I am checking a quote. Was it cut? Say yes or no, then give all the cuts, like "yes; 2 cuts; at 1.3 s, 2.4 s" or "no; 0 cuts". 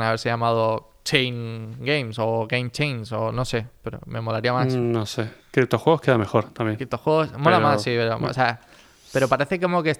no; 0 cuts